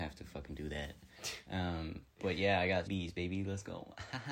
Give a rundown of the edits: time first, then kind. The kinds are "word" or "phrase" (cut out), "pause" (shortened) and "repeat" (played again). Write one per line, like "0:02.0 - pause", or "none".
0:02.9 - word